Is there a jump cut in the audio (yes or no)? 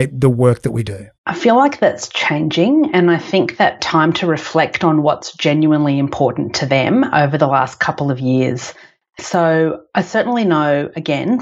yes